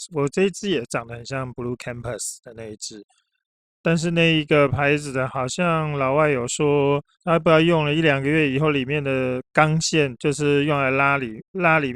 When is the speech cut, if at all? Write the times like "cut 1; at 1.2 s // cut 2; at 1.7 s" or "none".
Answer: cut 1; at 7.1 s